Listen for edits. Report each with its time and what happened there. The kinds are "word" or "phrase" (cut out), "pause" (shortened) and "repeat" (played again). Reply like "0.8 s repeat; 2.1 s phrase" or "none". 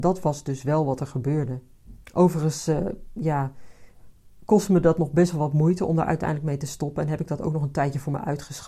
2.0 s pause